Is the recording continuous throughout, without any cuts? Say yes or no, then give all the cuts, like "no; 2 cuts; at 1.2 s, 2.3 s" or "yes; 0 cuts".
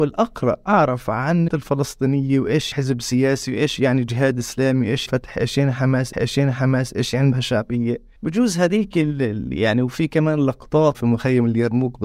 no; 7 cuts; at 1.5 s, 2.7 s, 5.1 s, 6.1 s, 7.3 s, 8.2 s, 10.9 s